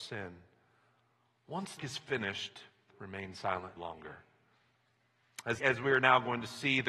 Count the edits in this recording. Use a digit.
4